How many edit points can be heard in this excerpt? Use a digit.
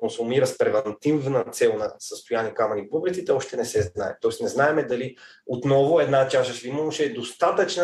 1